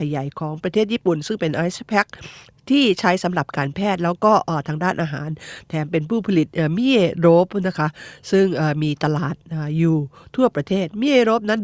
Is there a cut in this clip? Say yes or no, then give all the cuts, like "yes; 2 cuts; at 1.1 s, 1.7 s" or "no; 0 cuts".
no; 0 cuts